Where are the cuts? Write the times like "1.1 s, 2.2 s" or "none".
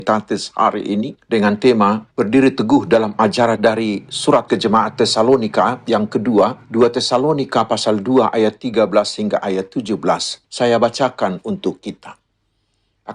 1.2 s, 2.1 s, 3.5 s, 4.5 s, 6.6 s, 10.4 s